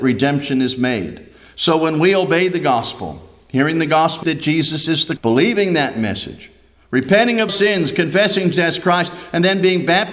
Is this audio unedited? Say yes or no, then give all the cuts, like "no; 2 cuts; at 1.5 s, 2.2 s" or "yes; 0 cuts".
no; 4 cuts; at 4.2 s, 5.2 s, 7.5 s, 8.5 s